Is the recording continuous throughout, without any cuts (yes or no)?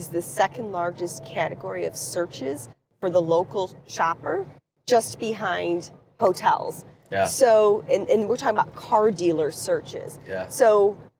yes